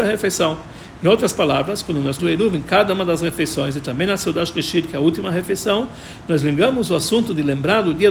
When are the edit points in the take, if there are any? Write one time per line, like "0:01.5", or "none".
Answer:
0:02.2

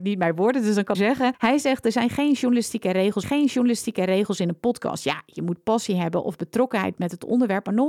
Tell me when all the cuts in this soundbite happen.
0:00.9
0:03.2

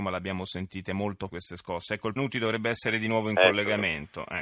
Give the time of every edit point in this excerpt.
0:01.3
0:02.2

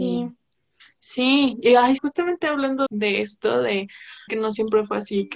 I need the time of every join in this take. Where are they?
0:02.0
0:02.9
0:04.3

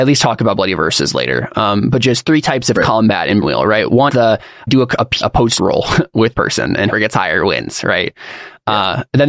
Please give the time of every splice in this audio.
0:02.2
0:03.4
0:04.1
0:04.7
0:05.2
0:05.6
0:06.3
0:06.9

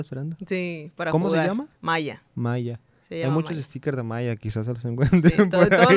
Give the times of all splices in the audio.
none

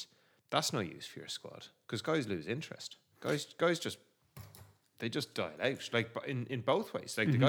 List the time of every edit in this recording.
none

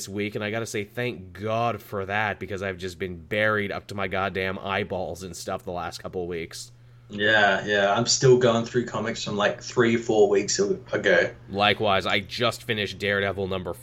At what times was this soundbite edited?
none

